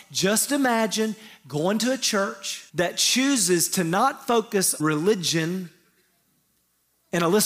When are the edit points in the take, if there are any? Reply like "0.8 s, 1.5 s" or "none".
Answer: 2.7 s, 4.8 s

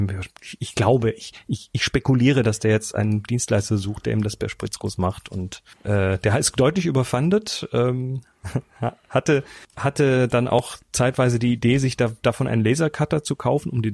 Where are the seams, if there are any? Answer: 5.7 s, 9.6 s

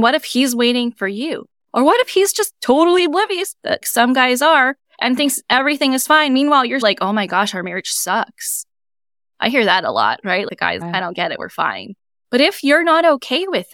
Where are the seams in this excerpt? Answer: 3.8 s, 6.8 s, 10.8 s

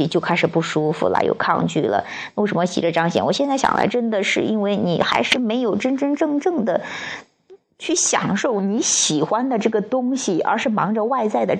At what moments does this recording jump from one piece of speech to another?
1.1 s

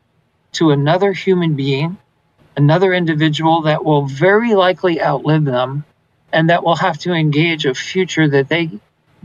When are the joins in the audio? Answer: none

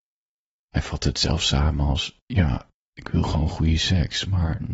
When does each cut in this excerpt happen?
2.8 s

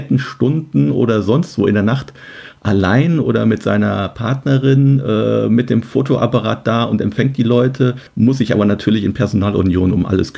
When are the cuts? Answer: 8.1 s

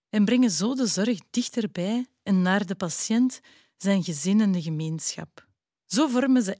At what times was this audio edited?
none

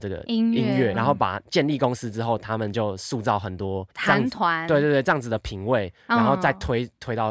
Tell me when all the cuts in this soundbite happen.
0.9 s, 3.9 s

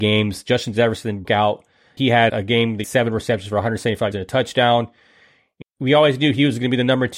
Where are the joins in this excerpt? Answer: 1.2 s, 2.0 s, 2.3 s, 2.8 s, 4.1 s, 5.6 s

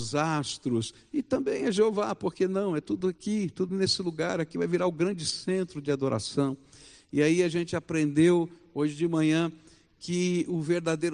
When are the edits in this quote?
none

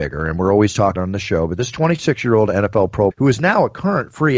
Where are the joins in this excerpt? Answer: 1.0 s, 3.1 s

